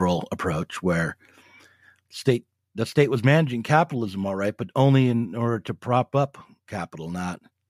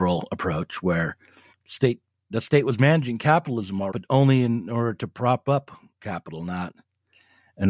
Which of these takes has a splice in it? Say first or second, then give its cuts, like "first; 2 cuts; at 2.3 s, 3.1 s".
second; 2 cuts; at 1.5 s, 3.9 s